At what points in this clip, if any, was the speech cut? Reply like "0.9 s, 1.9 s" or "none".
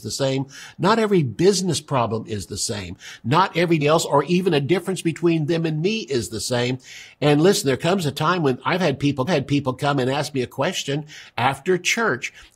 3.8 s, 9.3 s